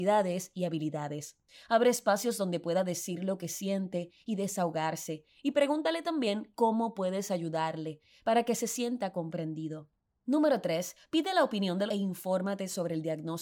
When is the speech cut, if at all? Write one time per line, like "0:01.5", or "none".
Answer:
0:11.9